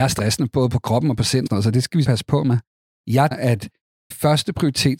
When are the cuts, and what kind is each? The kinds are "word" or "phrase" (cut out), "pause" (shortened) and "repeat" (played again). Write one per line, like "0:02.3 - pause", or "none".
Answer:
0:01.5 - word
0:02.0 - word
0:03.3 - word
0:04.1 - word